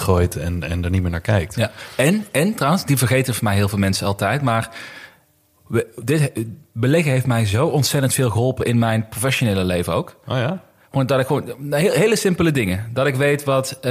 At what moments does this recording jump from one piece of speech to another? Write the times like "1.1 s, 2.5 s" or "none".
none